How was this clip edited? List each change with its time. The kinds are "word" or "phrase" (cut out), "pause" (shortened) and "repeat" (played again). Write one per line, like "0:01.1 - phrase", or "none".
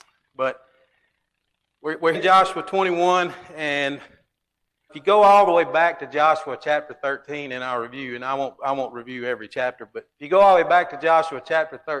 0:02.1 - word
0:04.9 - word
0:10.1 - pause